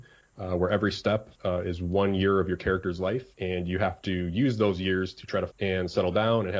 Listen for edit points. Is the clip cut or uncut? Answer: cut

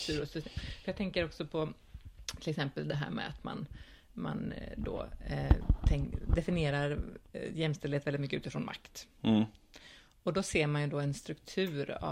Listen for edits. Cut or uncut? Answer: uncut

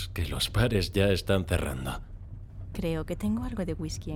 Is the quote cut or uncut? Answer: uncut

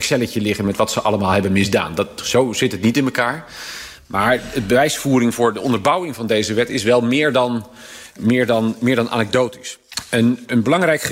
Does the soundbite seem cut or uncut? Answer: cut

